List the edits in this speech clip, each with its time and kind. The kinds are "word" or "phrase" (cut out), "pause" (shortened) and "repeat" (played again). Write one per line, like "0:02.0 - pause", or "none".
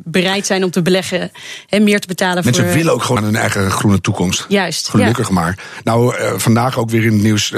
0:03.2 - phrase

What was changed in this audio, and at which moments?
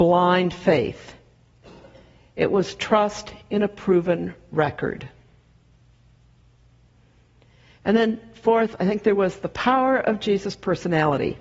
none

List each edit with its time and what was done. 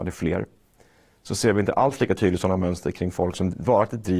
none

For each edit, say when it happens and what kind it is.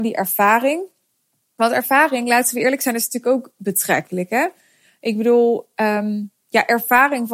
none

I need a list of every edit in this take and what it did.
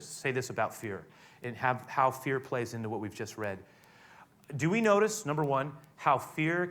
none

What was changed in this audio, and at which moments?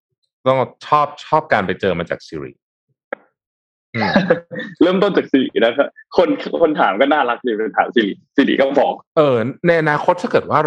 0:09.1 - pause

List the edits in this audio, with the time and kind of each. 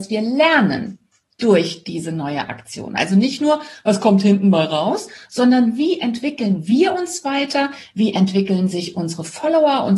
0:01.2 - pause

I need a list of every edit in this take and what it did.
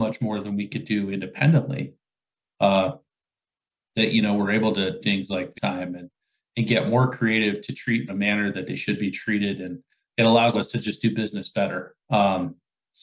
0:05.0 - word
0:05.5 - word
0:08.1 - phrase
0:10.5 - word
0:12.0 - pause

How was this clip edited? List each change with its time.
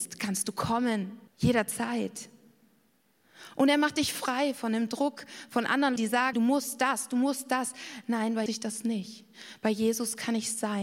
0:01.3 - pause
0:06.0 - word
0:06.3 - word
0:08.5 - phrase

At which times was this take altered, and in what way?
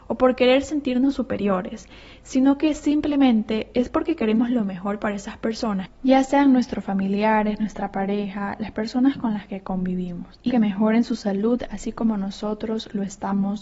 0:10.5 - word

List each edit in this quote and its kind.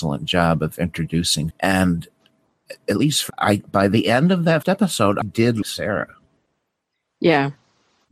0:01.5 - word
0:03.3 - word
0:04.6 - word
0:05.2 - word
0:05.6 - word

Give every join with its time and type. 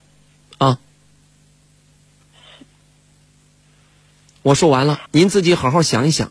0:05.1 - pause

